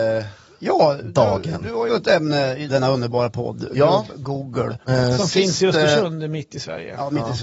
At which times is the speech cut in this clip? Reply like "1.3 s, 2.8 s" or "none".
1.9 s, 2.7 s